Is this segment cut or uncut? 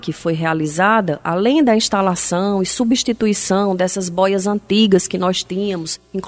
uncut